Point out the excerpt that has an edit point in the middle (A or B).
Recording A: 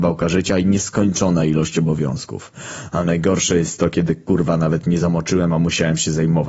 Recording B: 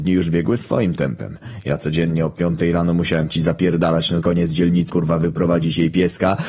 B